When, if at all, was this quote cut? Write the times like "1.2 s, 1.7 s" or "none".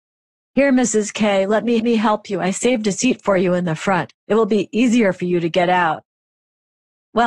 1.8 s, 4.2 s